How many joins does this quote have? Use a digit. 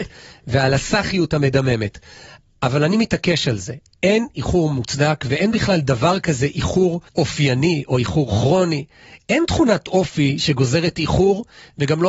1